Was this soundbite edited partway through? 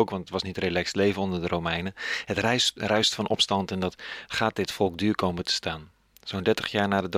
no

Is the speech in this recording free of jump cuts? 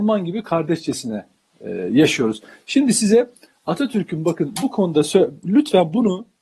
yes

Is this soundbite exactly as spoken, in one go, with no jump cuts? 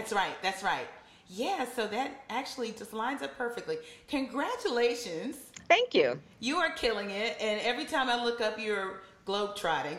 yes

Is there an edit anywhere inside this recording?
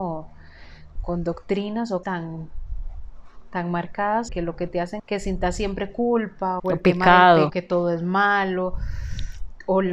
yes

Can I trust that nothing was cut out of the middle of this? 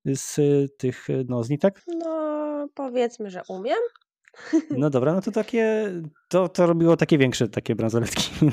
yes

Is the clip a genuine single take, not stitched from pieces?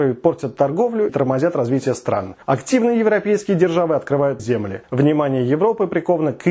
no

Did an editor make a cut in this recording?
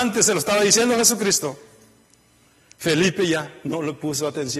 no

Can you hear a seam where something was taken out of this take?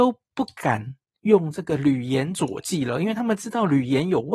no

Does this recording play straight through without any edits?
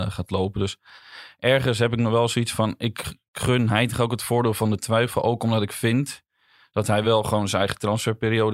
yes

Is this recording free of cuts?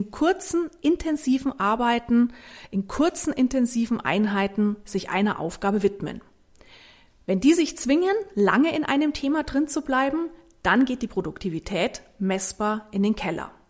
yes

